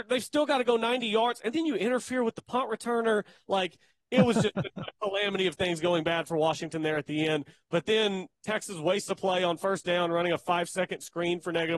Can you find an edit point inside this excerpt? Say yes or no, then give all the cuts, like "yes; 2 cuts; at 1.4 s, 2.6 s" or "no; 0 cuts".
no; 0 cuts